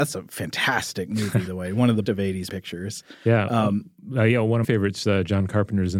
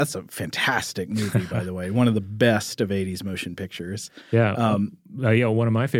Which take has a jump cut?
first; 4 cuts; at 1.5 s, 2.0 s, 2.5 s, 4.6 s

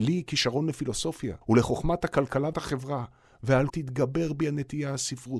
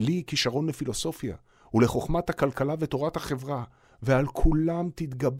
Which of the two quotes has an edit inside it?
first; 3 cuts; at 1.4 s, 2.5 s, 3.7 s

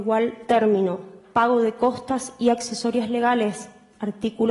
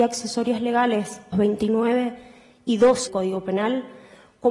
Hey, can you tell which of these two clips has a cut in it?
second; 2 cuts; at 1.3 s, 3.1 s

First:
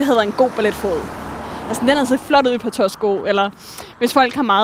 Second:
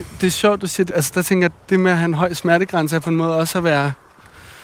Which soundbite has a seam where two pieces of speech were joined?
second; 1 cut; at 0.9 s

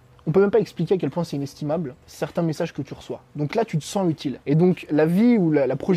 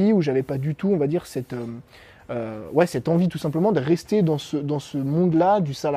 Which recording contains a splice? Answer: first; 2 cuts; at 2.0 s, 4.4 s

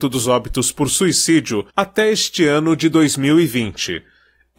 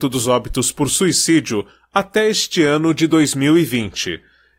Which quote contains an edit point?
first; 1 cut; at 1.7 s

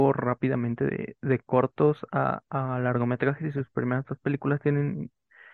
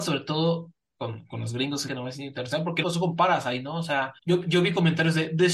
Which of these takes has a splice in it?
second; 3 cuts; at 1.9 s, 2.8 s, 4.2 s

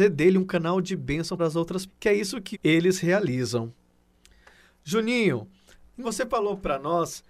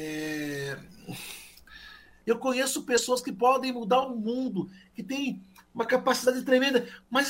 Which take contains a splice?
first; 4 cuts; at 1.4 s, 1.9 s, 2.5 s, 6.0 s

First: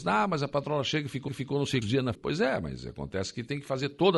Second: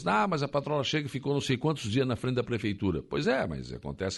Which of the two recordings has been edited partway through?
first; 3 cuts; at 1.3 s, 1.8 s, 2.1 s

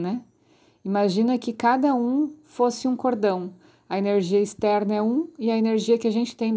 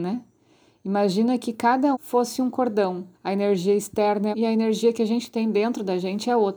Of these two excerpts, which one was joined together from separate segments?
second; 3 cuts; at 1.9 s, 3.1 s, 4.3 s

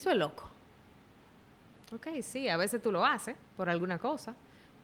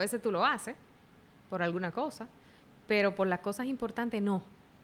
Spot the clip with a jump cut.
first; 1 cut; at 3.4 s

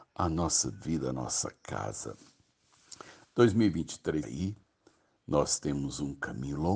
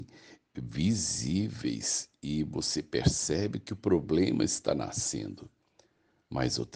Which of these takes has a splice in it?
first; 1 cut; at 4.2 s

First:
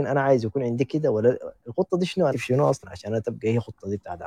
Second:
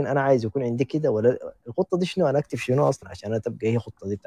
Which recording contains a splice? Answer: first; 1 cut; at 2.3 s

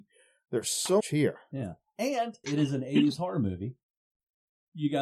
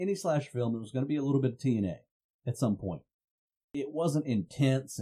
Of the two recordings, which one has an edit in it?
first; 2 cuts; at 1.0 s, 2.4 s

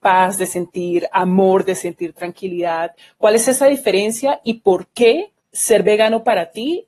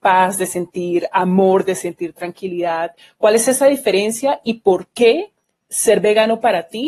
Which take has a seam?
first; 1 cut; at 5.4 s

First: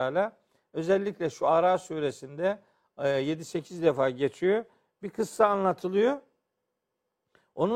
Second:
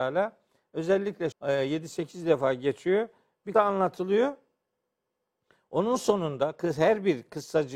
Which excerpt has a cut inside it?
second; 2 cuts; at 1.3 s, 3.5 s

